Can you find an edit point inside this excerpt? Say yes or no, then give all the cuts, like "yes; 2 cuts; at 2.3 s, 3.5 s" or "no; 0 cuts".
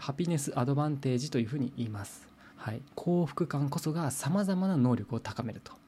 yes; 2 cuts; at 2.5 s, 2.9 s